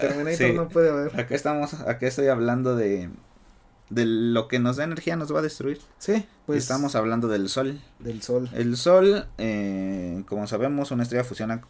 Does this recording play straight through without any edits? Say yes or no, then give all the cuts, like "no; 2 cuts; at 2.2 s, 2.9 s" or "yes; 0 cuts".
yes; 0 cuts